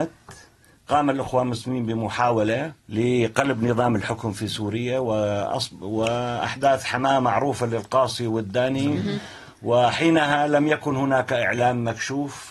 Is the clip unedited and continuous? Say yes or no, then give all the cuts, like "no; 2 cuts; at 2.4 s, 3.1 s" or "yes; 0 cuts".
no; 1 cut; at 2.8 s